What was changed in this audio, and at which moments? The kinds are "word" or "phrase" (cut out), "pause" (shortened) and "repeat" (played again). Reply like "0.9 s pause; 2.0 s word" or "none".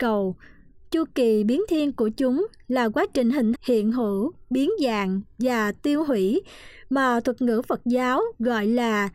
3.5 s word